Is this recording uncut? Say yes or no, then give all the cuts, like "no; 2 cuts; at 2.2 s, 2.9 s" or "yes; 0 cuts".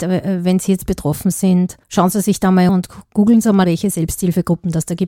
no; 3 cuts; at 1.8 s, 2.7 s, 3.6 s